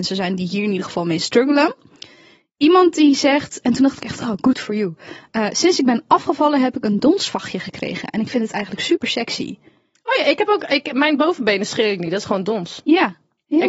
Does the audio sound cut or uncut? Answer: uncut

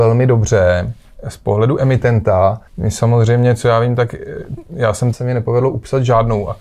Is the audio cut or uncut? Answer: cut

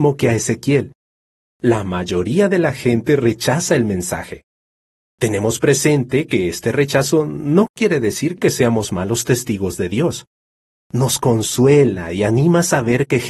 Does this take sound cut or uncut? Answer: uncut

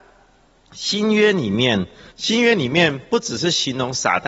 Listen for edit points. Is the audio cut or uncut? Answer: cut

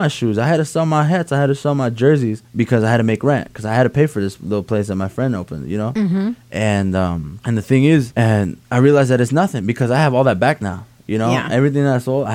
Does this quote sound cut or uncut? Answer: uncut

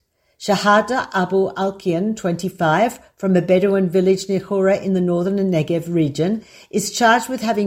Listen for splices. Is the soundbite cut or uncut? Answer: uncut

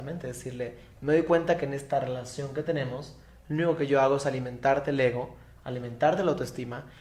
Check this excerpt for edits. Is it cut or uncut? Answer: uncut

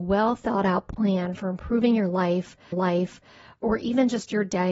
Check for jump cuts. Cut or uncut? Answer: cut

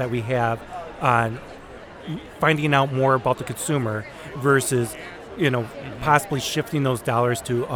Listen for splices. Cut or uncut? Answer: uncut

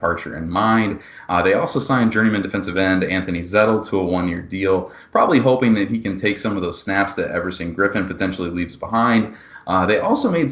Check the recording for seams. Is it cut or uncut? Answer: uncut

